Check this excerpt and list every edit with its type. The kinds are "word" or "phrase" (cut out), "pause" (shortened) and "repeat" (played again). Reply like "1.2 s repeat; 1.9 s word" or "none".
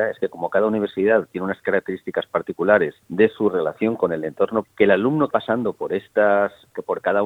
3.0 s pause; 4.6 s word; 5.3 s word